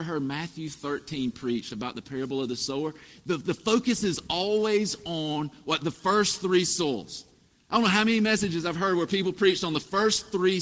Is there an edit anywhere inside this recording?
no; 0 cuts

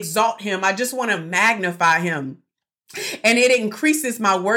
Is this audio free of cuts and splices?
yes; 0 cuts

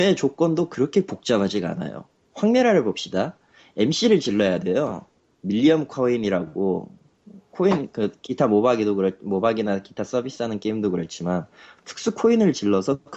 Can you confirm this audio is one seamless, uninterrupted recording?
yes; 0 cuts

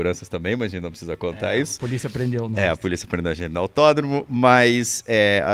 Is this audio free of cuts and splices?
yes; 0 cuts

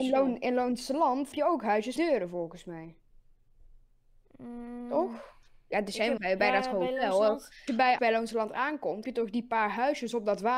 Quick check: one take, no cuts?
no; 6 cuts; at 1.3 s, 2.0 s, 6.2 s, 7.7 s, 8.0 s, 9.0 s

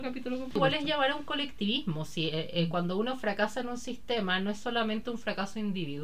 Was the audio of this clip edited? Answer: no; 0 cuts

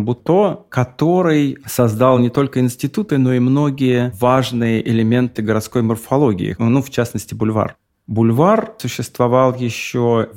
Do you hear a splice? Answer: no; 0 cuts

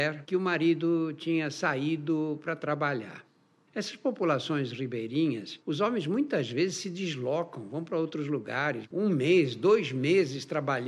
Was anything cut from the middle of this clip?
yes; 1 cut; at 8.9 s

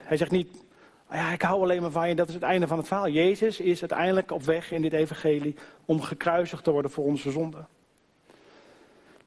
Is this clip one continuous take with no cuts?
yes; 0 cuts

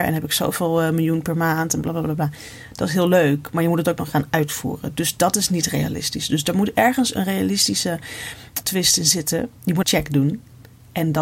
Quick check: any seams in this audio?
yes; 2 cuts; at 8.6 s, 9.8 s

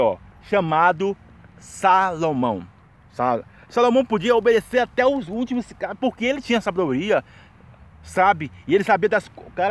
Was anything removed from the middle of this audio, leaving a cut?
yes; 1 cut; at 2.8 s

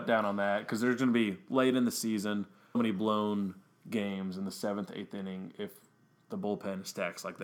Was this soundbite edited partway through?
yes; 1 cut; at 2.7 s

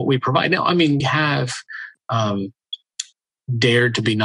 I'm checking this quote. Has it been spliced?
yes; 1 cut; at 1.0 s

